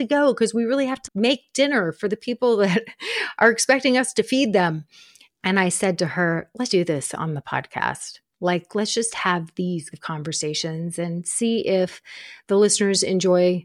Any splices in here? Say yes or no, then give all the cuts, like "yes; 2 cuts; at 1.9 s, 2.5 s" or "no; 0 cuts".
yes; 3 cuts; at 1.0 s, 6.7 s, 9.9 s